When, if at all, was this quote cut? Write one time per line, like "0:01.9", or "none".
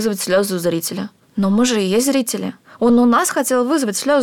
none

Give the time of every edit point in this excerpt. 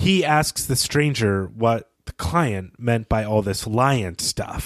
0:02.0

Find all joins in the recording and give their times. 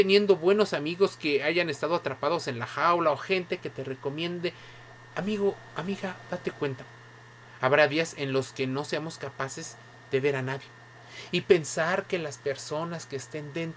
none

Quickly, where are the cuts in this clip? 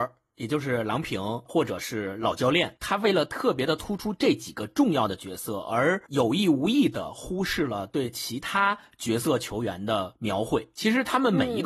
0:01.5

